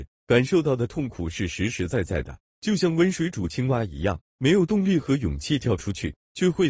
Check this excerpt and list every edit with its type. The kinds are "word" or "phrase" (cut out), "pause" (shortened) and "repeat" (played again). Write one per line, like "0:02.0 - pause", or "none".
0:02.4 - pause